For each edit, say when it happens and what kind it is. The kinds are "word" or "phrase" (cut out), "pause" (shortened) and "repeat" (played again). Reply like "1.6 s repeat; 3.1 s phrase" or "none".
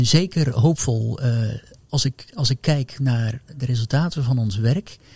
none